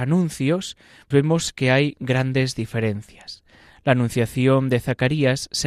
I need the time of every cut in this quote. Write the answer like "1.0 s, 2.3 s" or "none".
1.1 s

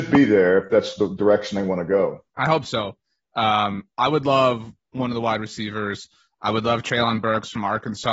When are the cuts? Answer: 2.3 s

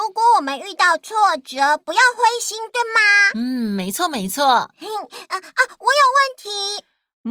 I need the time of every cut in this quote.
none

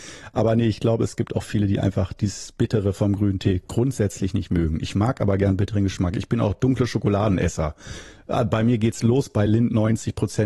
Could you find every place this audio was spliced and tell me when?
none

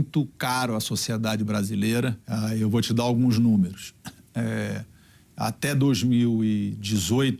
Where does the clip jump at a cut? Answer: 2.2 s

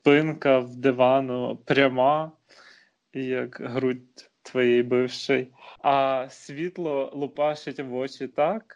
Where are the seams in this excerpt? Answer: none

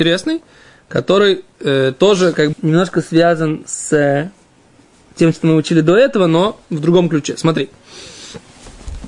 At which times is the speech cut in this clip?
2.5 s

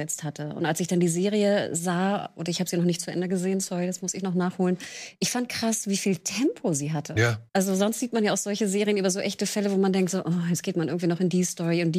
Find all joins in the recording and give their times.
7.5 s

